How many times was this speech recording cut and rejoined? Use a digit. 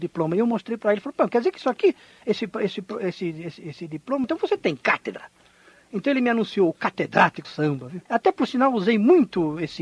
3